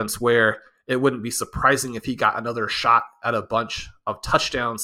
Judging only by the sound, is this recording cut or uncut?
uncut